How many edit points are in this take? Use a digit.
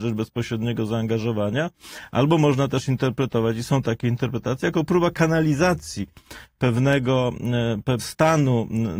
1